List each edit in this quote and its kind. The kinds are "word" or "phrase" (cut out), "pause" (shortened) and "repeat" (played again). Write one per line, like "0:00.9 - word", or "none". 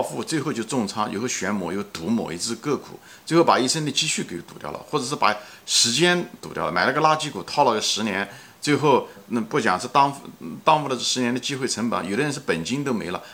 0:09.2 - word